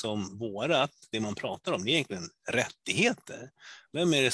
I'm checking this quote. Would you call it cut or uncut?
uncut